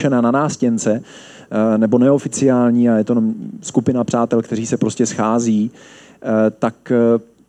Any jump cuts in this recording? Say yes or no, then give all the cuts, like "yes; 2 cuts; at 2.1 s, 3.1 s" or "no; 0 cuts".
no; 0 cuts